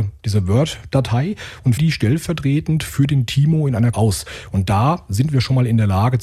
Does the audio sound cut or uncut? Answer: cut